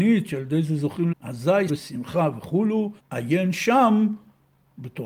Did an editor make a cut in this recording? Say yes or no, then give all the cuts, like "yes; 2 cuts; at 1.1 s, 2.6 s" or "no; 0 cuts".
yes; 3 cuts; at 1.1 s, 1.7 s, 3.0 s